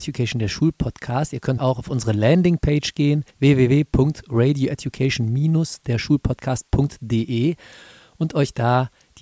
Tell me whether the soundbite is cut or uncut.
cut